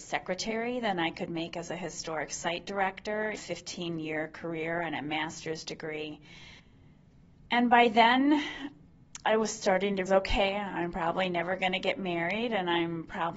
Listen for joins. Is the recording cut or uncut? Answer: cut